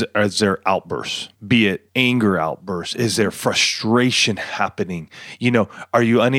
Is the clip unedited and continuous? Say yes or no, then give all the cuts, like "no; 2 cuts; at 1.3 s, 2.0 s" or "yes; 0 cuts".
no; 2 cuts; at 1.4 s, 1.9 s